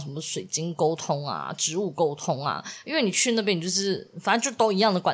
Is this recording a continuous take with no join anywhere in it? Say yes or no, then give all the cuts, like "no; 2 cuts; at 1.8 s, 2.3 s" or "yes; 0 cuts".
yes; 0 cuts